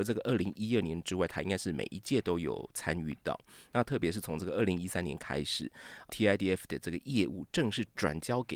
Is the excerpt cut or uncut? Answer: uncut